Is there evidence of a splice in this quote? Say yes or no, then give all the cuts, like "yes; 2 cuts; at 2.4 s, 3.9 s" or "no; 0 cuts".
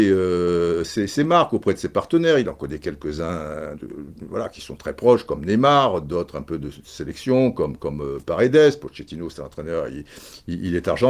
yes; 1 cut; at 3.8 s